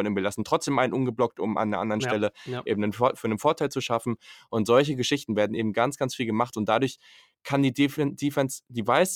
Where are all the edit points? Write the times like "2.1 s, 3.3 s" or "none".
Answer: none